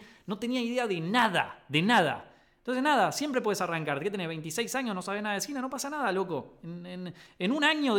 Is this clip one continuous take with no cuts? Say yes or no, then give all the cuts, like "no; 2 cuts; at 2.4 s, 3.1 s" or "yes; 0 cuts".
yes; 0 cuts